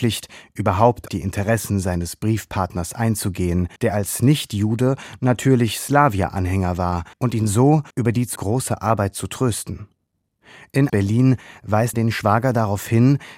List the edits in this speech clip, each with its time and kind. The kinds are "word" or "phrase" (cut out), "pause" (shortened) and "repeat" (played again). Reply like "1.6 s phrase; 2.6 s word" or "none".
1.1 s word; 3.8 s pause; 7.1 s pause; 7.9 s pause; 8.4 s word; 10.9 s phrase; 11.9 s word